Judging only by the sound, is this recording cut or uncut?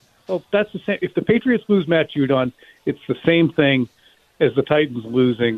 uncut